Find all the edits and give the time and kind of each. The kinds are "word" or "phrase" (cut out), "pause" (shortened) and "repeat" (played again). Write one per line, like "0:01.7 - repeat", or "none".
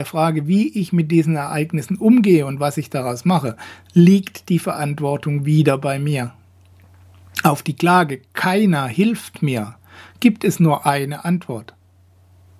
none